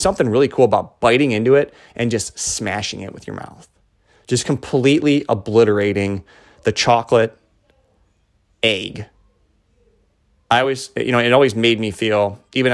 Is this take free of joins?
yes; 0 cuts

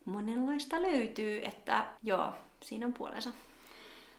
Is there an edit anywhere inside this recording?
yes; 1 cut; at 2.0 s

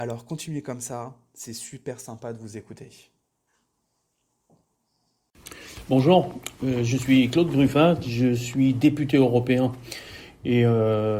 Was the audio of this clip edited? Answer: no; 0 cuts

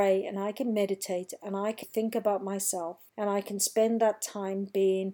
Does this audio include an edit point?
yes; 2 cuts; at 1.8 s, 3.1 s

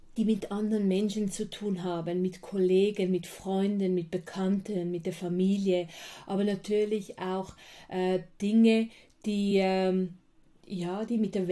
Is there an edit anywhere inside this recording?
no; 0 cuts

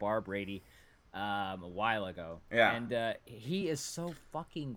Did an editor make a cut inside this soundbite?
no; 0 cuts

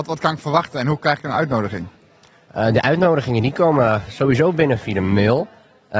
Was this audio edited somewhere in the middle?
no; 0 cuts

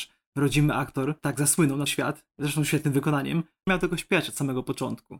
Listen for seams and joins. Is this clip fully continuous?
no; 2 cuts; at 1.9 s, 3.7 s

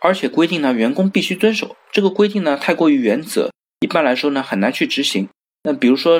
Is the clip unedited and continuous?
yes; 0 cuts

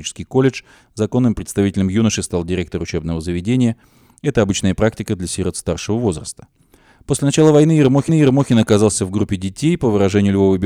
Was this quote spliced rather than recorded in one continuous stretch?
yes; 1 cut; at 8.1 s

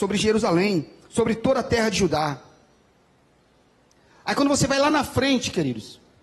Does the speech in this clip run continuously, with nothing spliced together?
yes; 0 cuts

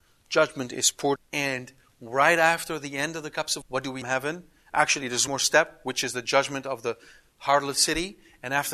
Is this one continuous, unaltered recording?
no; 4 cuts; at 1.2 s, 3.6 s, 4.0 s, 5.3 s

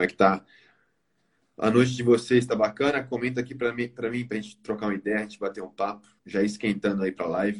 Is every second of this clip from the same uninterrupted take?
no; 1 cut; at 6.2 s

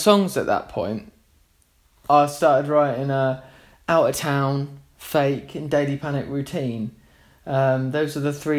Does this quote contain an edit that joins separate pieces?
no; 0 cuts

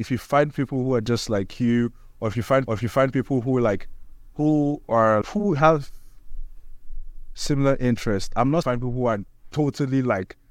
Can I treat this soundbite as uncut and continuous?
no; 3 cuts; at 2.7 s, 5.2 s, 8.6 s

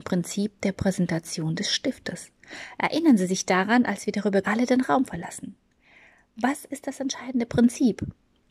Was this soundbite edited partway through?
yes; 1 cut; at 4.4 s

